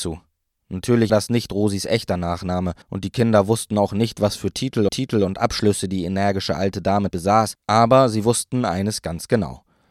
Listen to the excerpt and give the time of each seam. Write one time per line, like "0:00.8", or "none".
0:01.1
0:02.8
0:04.9
0:07.1
0:07.6